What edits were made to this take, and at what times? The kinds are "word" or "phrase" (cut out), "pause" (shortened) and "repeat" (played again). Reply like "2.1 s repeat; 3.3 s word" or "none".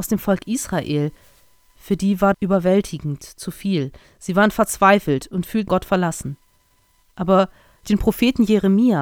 2.3 s word; 5.7 s phrase; 7.8 s word